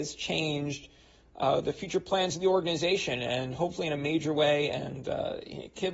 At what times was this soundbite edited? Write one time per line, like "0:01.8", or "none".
none